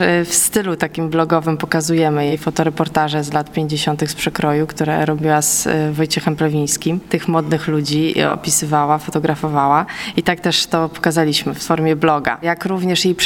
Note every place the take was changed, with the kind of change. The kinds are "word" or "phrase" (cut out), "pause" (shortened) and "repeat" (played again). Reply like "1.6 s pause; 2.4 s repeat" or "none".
none